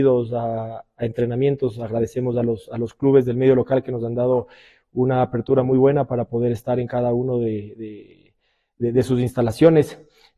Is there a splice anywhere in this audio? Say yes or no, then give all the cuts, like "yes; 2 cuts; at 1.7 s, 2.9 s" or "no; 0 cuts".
no; 0 cuts